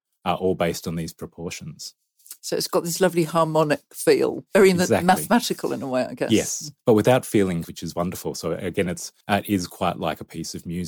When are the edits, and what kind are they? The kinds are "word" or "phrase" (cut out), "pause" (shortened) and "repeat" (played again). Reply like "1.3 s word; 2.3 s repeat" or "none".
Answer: 6.8 s pause; 7.6 s word; 9.2 s pause